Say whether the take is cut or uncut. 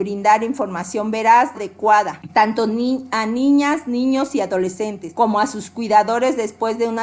cut